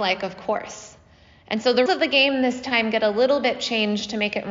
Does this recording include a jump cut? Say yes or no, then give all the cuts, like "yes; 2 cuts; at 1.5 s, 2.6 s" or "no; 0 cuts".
yes; 1 cut; at 1.9 s